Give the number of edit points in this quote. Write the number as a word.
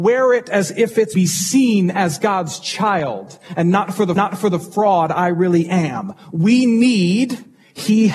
two